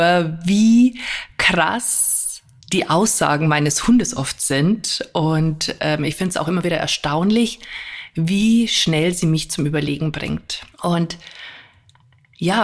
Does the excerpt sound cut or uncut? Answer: cut